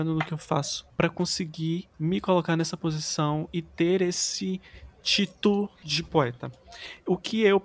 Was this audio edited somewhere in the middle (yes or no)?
no